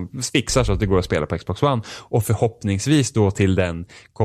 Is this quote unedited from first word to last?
yes; 0 cuts

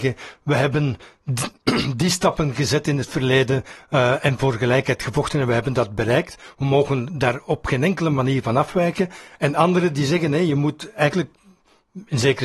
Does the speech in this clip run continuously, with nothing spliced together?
yes; 0 cuts

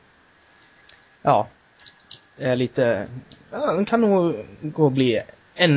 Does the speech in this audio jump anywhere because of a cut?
no; 0 cuts

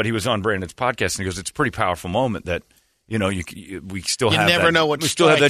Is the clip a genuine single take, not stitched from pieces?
yes; 0 cuts

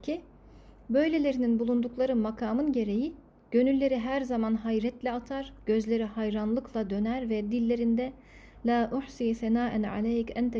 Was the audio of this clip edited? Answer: no; 0 cuts

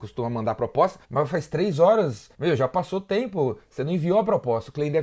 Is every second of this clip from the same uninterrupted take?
no; 2 cuts; at 1.0 s, 2.3 s

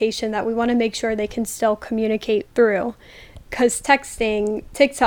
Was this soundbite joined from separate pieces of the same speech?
no; 0 cuts

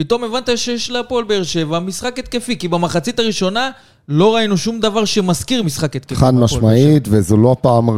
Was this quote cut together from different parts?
no; 0 cuts

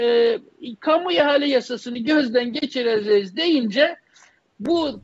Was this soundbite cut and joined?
no; 0 cuts

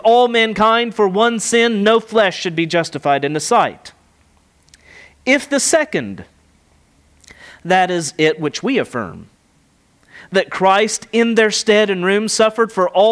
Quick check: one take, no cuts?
yes; 0 cuts

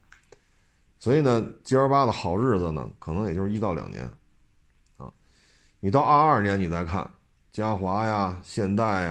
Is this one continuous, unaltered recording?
yes; 0 cuts

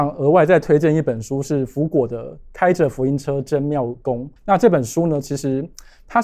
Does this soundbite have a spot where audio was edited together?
yes; 1 cut; at 4.4 s

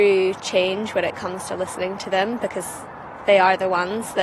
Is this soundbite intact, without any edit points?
yes; 0 cuts

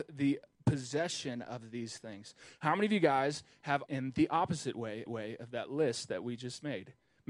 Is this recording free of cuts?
no; 2 cuts; at 3.9 s, 5.1 s

